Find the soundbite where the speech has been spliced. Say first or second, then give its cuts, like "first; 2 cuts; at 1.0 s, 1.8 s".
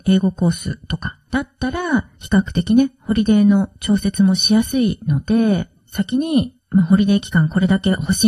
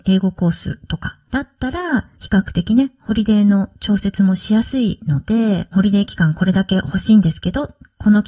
second; 1 cut; at 5.7 s